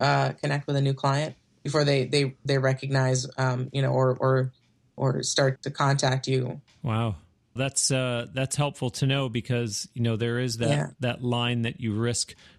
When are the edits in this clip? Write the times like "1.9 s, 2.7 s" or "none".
5.6 s, 7.6 s